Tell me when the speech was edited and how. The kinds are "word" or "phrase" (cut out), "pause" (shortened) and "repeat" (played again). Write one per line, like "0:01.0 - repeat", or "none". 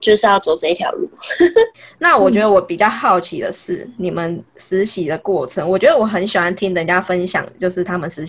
0:04.5 - pause